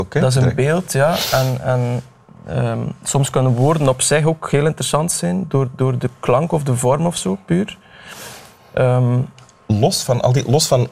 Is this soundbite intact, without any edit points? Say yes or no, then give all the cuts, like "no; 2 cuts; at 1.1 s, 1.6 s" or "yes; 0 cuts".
yes; 0 cuts